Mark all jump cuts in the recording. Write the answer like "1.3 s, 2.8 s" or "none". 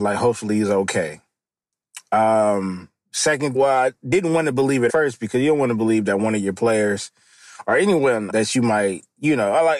3.5 s, 4.9 s, 8.3 s